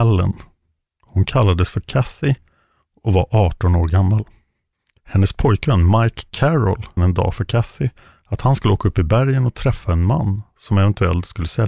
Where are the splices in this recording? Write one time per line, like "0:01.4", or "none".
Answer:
0:07.0

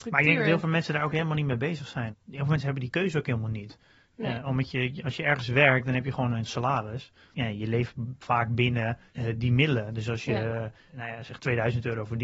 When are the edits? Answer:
none

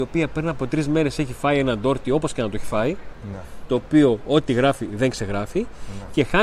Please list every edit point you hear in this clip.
none

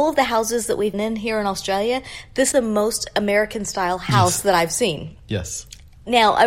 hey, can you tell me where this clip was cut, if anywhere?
0:00.9
0:02.5

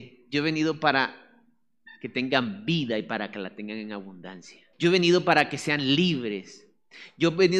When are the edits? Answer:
0:02.0
0:04.7

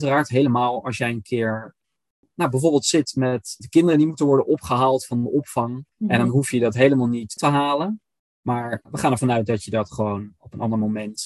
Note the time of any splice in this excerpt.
0:03.6
0:05.9
0:07.4
0:08.8

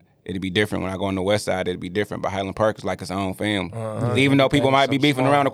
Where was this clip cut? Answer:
none

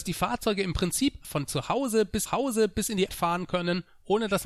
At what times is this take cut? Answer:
0:01.2
0:02.3
0:03.1

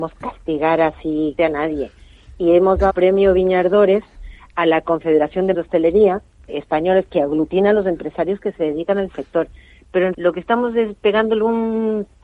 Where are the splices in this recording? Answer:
0:01.4
0:02.9
0:05.5
0:06.5
0:07.1
0:10.1

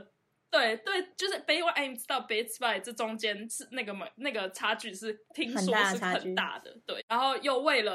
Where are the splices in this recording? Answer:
0:01.1

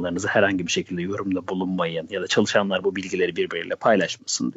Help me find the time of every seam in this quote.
none

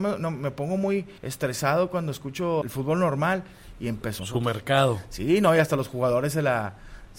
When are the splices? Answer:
0:01.2
0:02.6
0:04.2

